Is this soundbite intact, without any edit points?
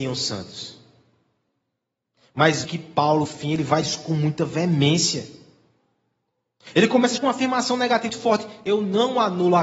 no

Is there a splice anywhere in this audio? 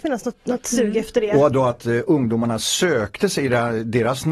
no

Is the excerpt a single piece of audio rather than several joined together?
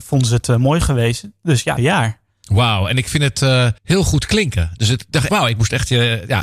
no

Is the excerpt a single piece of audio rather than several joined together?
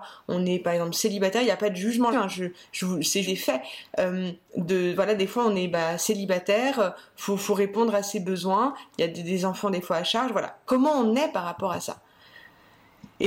no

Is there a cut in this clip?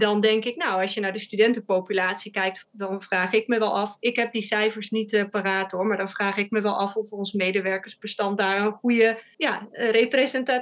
no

